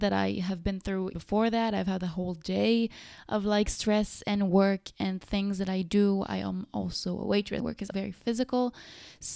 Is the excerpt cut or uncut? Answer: cut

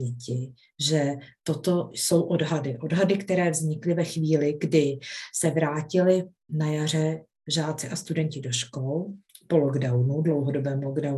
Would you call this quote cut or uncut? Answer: uncut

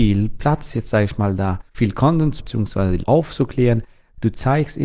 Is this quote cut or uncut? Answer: cut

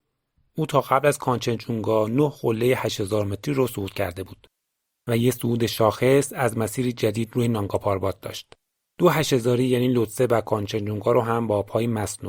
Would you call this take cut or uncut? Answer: uncut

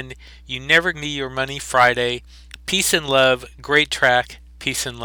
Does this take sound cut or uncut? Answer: cut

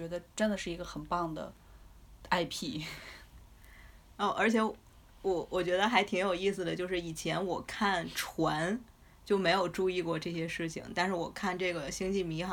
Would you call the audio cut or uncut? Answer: uncut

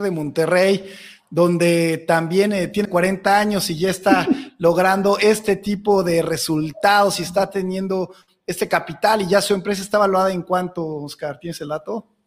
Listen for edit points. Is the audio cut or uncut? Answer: cut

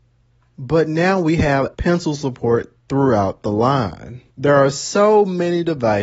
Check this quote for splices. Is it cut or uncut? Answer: cut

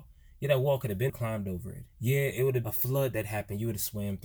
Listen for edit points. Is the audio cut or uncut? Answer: cut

